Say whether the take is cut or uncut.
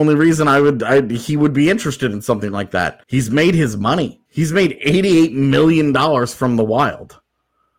cut